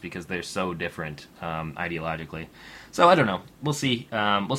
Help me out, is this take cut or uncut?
uncut